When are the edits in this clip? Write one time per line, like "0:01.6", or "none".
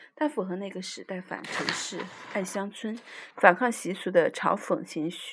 0:03.3